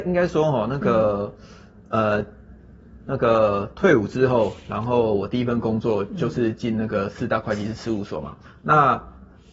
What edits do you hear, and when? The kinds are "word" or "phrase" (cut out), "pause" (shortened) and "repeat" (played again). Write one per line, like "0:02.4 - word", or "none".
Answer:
none